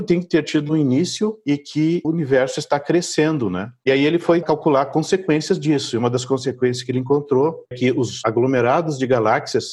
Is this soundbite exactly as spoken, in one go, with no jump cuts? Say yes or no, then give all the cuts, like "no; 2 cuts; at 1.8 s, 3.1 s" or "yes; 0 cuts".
no; 3 cuts; at 2.0 s, 4.4 s, 7.7 s